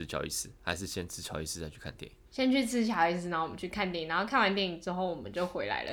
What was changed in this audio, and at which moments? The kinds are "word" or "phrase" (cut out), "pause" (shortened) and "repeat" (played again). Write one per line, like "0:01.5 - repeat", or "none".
0:02.3 - pause